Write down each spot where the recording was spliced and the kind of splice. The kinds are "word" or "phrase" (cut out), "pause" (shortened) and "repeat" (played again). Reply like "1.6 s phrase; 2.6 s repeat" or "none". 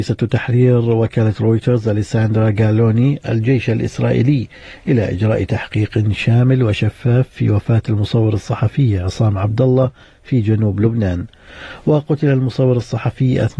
none